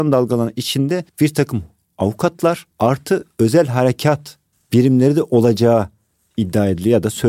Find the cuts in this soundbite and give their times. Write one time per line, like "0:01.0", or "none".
0:01.1
0:02.7
0:04.5